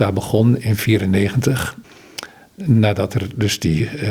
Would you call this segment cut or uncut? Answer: uncut